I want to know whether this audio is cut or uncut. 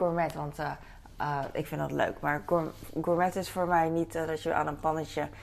uncut